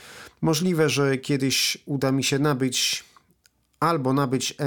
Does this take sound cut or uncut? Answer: uncut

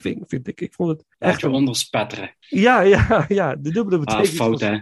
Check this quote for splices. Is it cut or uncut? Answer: cut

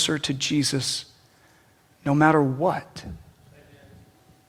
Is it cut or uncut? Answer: uncut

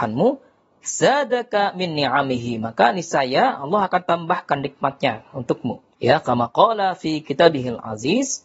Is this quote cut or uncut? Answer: cut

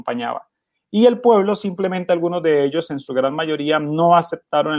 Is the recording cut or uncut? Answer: uncut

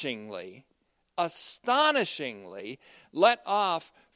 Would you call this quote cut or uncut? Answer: uncut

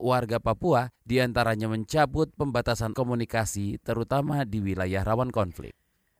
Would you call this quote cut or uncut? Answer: cut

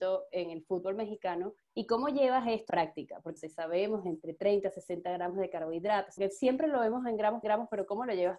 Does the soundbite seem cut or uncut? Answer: cut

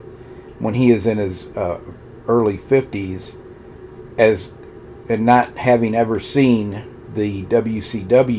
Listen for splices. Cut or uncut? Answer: uncut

